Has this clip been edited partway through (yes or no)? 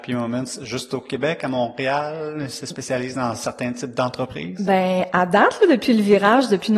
no